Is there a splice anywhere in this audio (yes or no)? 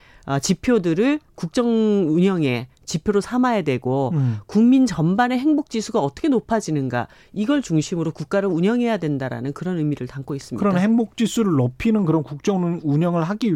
no